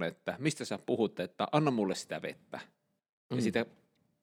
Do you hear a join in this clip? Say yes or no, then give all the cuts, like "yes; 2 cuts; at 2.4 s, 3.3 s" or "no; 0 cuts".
no; 0 cuts